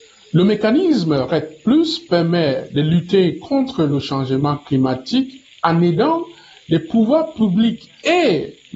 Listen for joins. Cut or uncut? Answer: uncut